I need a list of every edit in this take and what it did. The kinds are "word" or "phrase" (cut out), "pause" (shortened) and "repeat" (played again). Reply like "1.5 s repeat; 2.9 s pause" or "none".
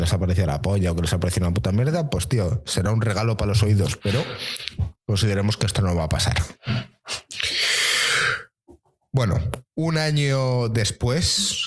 none